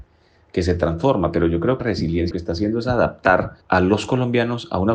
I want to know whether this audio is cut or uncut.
cut